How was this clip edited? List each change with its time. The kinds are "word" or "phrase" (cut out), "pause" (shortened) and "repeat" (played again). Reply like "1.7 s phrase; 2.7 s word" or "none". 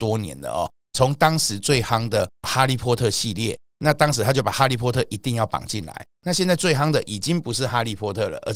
2.3 s pause